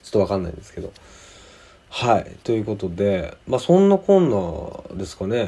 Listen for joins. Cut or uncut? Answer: uncut